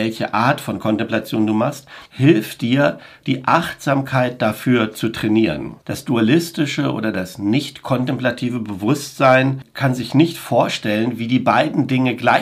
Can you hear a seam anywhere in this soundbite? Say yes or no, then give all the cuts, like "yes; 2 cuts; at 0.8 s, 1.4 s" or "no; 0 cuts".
yes; 2 cuts; at 2.0 s, 5.8 s